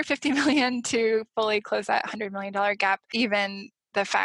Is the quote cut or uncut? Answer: uncut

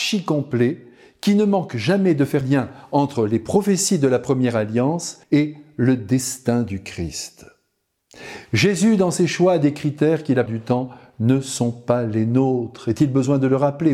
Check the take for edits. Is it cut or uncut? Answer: cut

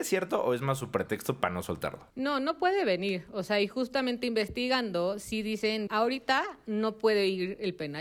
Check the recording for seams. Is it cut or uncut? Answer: cut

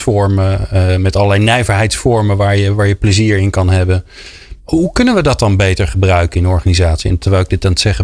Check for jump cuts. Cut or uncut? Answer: cut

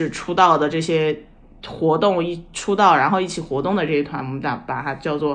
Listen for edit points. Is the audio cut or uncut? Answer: uncut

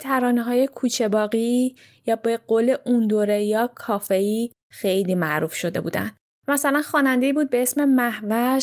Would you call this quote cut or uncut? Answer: uncut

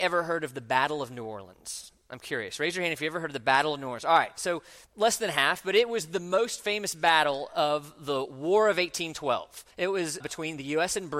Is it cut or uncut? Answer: cut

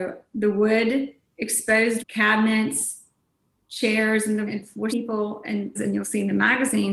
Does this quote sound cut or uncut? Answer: cut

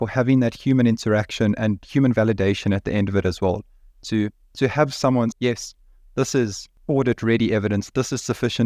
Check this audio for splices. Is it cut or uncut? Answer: cut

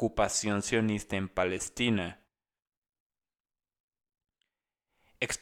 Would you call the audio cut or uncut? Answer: uncut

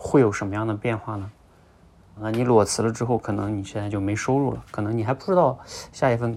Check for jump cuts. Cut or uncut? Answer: cut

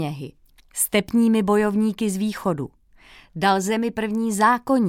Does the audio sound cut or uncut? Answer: uncut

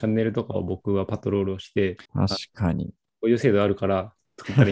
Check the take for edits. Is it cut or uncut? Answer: cut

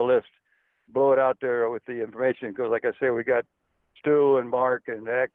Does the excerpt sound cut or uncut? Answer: uncut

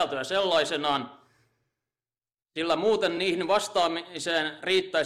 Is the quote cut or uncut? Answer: uncut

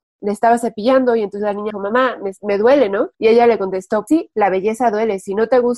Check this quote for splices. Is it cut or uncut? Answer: cut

